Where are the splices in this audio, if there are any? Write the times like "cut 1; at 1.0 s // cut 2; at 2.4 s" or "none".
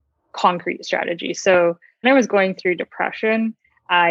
cut 1; at 2.0 s